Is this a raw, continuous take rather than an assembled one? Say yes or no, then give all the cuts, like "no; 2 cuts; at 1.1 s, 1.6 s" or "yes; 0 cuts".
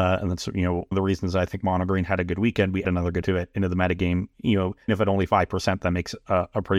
no; 4 cuts; at 0.9 s, 2.8 s, 3.2 s, 4.9 s